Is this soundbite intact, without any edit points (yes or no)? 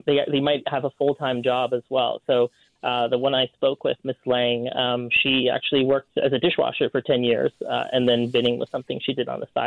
yes